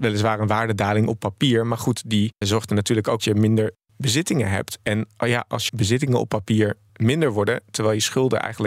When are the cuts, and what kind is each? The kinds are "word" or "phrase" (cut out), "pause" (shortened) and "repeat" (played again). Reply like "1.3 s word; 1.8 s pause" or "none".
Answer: 2.4 s word; 3.2 s phrase; 5.7 s word